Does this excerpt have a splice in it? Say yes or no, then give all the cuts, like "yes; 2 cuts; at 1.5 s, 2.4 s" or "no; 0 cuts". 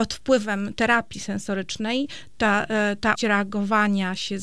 yes; 2 cuts; at 1.1 s, 3.2 s